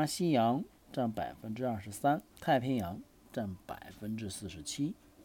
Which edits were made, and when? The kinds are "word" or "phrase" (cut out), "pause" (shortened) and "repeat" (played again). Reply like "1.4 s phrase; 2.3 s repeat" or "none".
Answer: 2.3 s pause